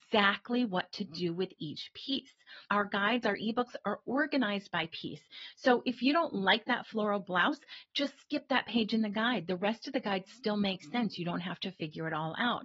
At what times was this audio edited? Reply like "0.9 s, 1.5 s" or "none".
2.7 s

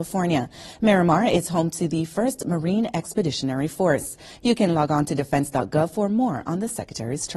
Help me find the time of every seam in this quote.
none

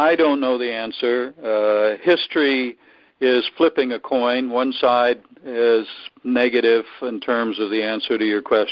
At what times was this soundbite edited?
none

